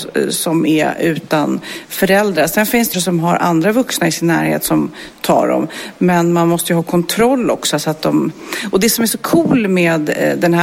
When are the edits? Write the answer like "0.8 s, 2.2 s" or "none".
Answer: 2.9 s